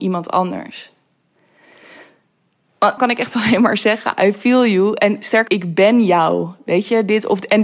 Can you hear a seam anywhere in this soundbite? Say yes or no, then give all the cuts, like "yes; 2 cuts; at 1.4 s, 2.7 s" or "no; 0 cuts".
yes; 2 cuts; at 3.0 s, 5.5 s